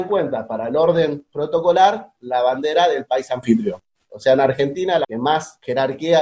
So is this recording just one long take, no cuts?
no; 1 cut; at 5.0 s

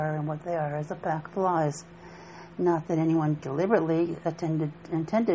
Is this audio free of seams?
no; 1 cut; at 3.4 s

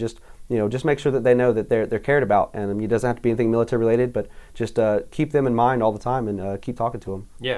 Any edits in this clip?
no; 0 cuts

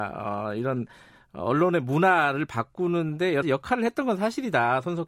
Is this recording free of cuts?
no; 1 cut; at 3.4 s

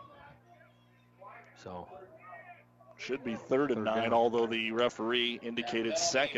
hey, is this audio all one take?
yes; 0 cuts

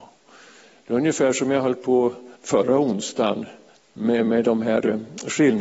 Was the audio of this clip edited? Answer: yes; 2 cuts; at 2.4 s, 3.7 s

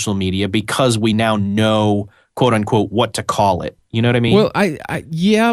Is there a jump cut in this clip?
no; 0 cuts

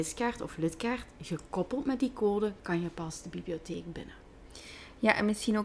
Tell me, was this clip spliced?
no; 0 cuts

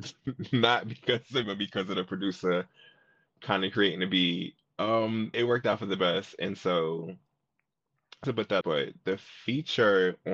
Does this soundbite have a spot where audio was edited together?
yes; 4 cuts; at 1.4 s, 5.3 s, 8.2 s, 8.6 s

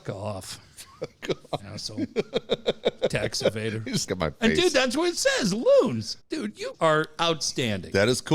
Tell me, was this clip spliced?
yes; 4 cuts; at 1.6 s, 4.1 s, 6.2 s, 6.7 s

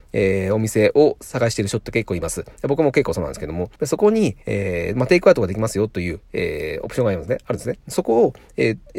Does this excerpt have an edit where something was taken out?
yes; 2 cuts; at 3.8 s, 4.4 s

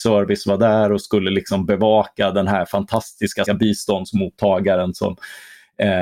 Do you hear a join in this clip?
yes; 1 cut; at 3.5 s

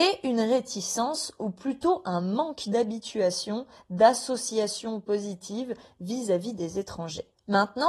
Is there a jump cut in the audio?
no; 0 cuts

